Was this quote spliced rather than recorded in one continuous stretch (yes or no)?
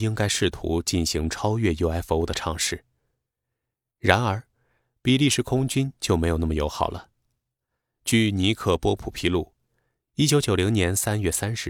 no